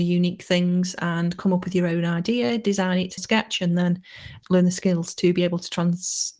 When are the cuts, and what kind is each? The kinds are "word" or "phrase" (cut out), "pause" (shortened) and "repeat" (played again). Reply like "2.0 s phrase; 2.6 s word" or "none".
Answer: 3.2 s phrase